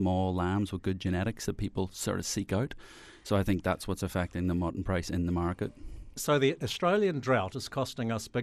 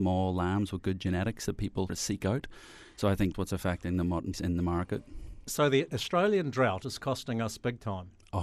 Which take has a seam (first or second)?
second